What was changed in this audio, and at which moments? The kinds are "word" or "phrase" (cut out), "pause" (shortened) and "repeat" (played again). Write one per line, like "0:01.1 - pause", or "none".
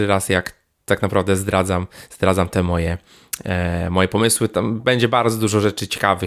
none